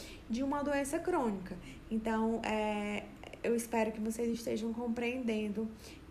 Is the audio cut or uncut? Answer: uncut